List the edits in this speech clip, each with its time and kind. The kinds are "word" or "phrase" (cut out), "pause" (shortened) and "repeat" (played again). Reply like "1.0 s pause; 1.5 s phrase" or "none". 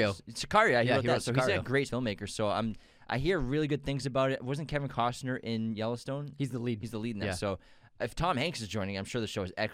1.9 s phrase